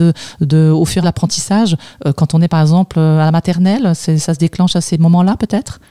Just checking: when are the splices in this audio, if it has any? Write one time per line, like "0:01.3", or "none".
0:01.0